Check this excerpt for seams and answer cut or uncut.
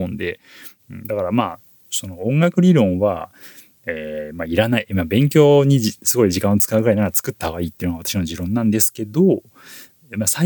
uncut